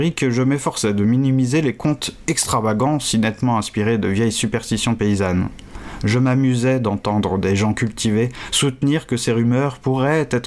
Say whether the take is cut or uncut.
uncut